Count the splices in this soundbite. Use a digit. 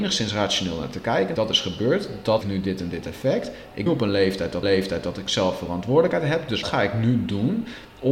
5